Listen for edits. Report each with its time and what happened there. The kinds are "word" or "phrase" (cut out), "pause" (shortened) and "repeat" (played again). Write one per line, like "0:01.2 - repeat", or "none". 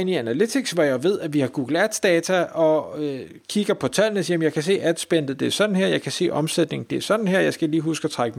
none